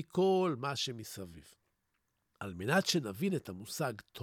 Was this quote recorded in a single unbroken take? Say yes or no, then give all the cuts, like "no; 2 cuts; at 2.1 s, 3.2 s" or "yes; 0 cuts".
yes; 0 cuts